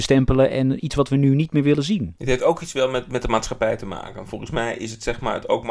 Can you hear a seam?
no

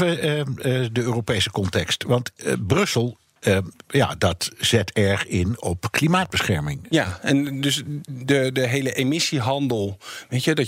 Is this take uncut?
yes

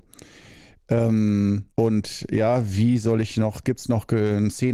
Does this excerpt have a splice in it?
yes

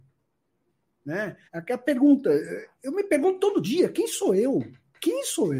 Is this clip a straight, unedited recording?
no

